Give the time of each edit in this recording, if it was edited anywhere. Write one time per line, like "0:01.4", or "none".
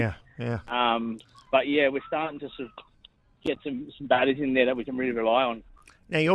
none